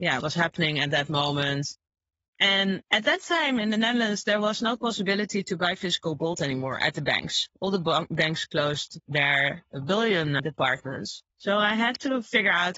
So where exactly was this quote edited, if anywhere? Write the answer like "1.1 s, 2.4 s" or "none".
2.8 s, 11.3 s